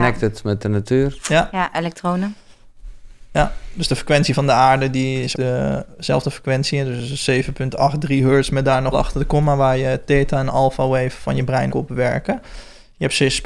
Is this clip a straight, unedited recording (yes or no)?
no